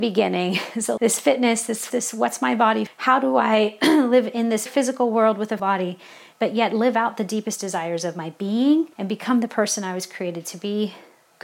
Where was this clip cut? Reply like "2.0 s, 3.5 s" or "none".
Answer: 1.0 s, 1.9 s, 2.9 s, 4.7 s, 5.6 s, 8.9 s